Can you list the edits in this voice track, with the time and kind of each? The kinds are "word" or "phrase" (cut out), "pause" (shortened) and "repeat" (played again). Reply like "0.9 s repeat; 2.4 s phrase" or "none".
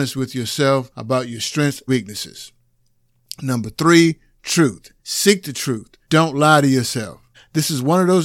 0.9 s pause; 1.9 s word; 5.0 s pause; 6.0 s pause; 7.3 s pause